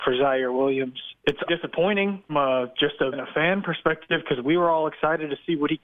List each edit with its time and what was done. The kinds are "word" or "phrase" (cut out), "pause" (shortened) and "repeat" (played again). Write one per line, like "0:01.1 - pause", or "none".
0:01.5 - phrase
0:02.3 - word
0:03.1 - word